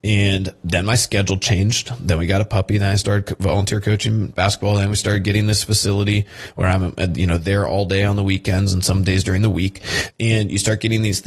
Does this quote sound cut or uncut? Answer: uncut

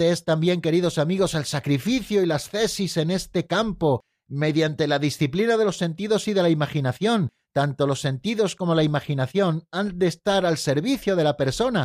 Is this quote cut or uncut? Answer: uncut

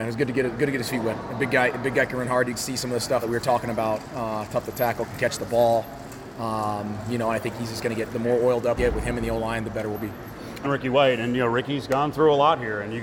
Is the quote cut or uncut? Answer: cut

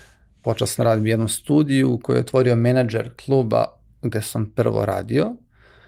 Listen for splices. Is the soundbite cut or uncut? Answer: uncut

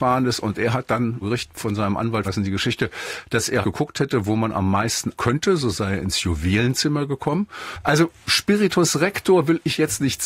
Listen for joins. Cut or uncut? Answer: cut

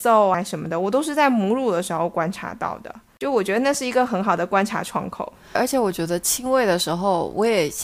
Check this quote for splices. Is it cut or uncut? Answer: cut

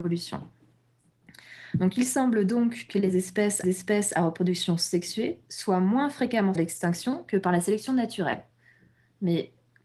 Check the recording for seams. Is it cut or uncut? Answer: cut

